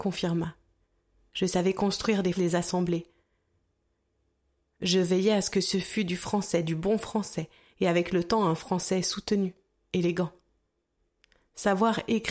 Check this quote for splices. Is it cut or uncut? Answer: cut